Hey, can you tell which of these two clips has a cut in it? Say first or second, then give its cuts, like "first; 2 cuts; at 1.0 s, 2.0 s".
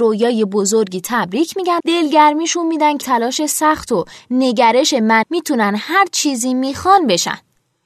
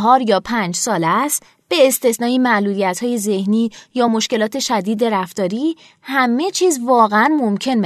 first; 3 cuts; at 1.8 s, 3.0 s, 5.2 s